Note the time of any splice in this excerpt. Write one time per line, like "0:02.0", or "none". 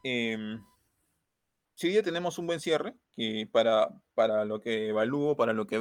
0:03.0

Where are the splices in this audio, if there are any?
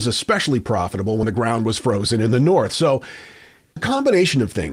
0:03.8

